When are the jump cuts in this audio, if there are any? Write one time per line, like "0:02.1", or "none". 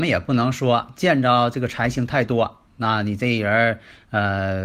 0:02.7